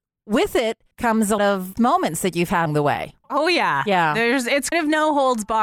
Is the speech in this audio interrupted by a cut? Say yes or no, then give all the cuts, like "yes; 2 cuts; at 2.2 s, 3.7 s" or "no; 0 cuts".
yes; 6 cuts; at 0.9 s, 1.4 s, 1.8 s, 2.7 s, 3.2 s, 4.7 s